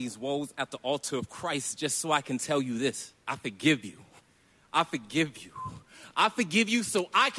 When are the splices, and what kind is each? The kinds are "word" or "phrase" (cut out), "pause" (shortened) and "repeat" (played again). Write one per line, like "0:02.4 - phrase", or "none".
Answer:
0:03.2 - pause
0:04.2 - pause